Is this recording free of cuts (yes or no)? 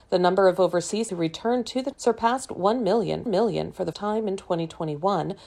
no